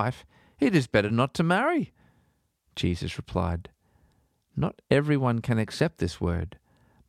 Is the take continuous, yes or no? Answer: yes